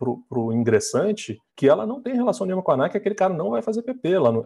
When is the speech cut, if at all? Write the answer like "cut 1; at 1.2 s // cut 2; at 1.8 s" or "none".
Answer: cut 1; at 1.5 s